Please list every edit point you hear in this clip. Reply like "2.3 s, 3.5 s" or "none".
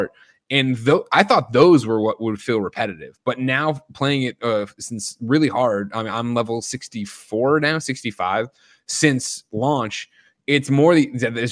none